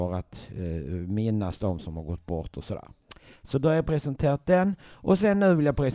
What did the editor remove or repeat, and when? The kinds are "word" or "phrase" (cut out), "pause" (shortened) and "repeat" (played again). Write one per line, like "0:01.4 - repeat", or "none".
none